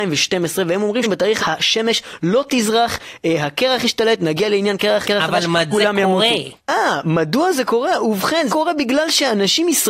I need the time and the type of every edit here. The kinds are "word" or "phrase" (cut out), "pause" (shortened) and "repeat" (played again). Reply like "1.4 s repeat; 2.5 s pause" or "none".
1.0 s word; 1.4 s word; 5.0 s word; 5.7 s word; 6.6 s word; 8.5 s word